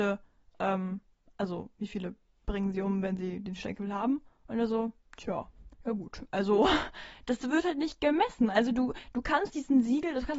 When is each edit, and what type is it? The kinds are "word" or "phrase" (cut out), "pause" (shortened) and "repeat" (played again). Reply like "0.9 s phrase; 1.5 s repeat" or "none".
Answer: 5.7 s pause